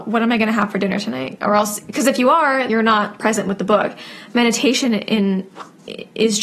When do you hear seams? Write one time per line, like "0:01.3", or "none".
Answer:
0:02.7